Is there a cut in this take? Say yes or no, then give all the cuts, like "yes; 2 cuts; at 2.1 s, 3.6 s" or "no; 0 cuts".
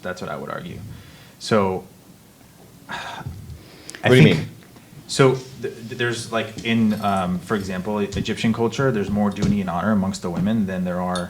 no; 0 cuts